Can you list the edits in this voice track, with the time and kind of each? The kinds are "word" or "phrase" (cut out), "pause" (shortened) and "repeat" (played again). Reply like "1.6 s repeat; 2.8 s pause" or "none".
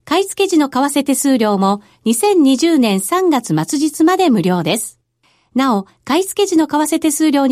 none